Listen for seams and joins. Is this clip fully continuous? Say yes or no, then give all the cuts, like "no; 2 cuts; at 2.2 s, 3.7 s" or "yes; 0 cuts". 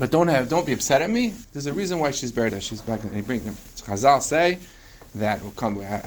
no; 2 cuts; at 1.4 s, 2.5 s